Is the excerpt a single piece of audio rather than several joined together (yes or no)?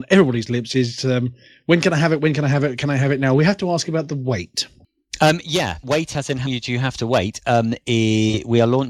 no